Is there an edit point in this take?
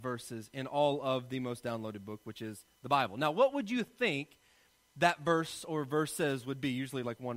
no; 0 cuts

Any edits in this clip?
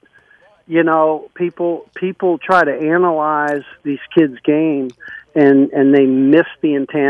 no; 0 cuts

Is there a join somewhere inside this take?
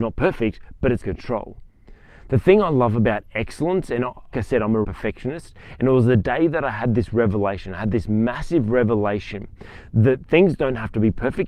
yes; 3 cuts; at 1.0 s, 4.3 s, 4.8 s

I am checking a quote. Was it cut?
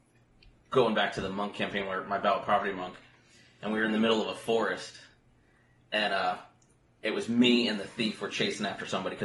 no; 0 cuts

